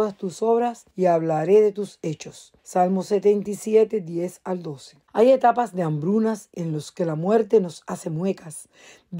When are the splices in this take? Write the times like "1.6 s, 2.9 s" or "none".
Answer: 0.9 s, 2.6 s, 5.0 s, 6.5 s